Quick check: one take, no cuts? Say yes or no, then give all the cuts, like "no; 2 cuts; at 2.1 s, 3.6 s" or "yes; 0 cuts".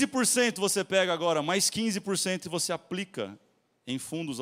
yes; 0 cuts